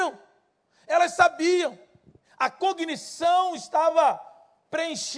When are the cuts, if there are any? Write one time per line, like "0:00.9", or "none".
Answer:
none

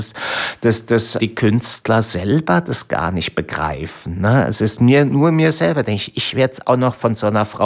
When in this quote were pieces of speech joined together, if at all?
0:01.2

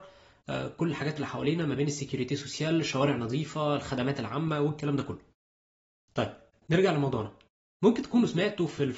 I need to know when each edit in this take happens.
none

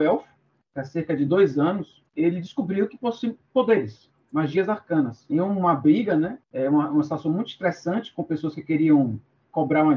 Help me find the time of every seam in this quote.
0:02.1
0:03.5
0:06.4

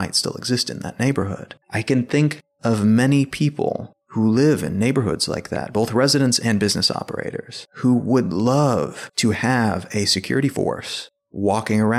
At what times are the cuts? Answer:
0:01.6
0:07.7

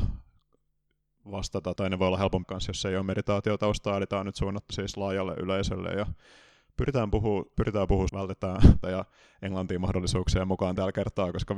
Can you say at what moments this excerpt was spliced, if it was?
0:01.8
0:02.4
0:04.7
0:07.5
0:08.1
0:08.8

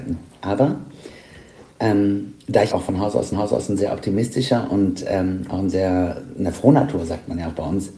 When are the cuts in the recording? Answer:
0:02.7
0:03.3

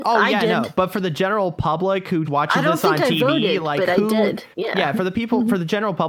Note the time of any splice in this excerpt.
0:02.2
0:04.5

